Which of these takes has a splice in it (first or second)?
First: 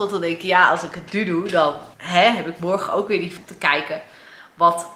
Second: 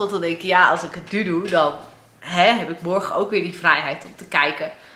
first